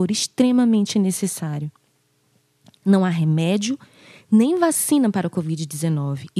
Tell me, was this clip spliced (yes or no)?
no